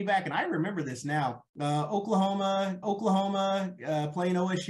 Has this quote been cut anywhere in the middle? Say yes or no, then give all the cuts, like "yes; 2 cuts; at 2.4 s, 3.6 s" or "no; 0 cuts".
yes; 2 cuts; at 1.5 s, 2.8 s